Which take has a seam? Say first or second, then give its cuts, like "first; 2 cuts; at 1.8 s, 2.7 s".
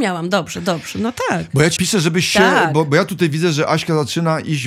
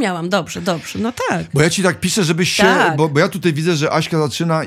first; 1 cut; at 1.8 s